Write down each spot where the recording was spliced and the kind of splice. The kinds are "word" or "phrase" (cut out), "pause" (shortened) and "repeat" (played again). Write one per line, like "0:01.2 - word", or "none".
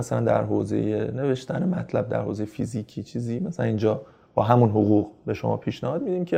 none